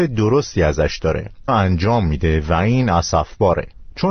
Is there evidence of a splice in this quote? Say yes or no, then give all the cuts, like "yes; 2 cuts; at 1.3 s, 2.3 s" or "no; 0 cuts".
yes; 1 cut; at 1.5 s